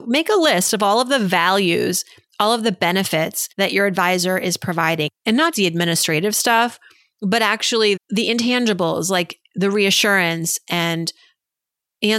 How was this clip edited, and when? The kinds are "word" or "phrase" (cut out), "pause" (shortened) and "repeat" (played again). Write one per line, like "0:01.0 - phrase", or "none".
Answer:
0:03.5 - pause
0:05.5 - word
0:08.0 - word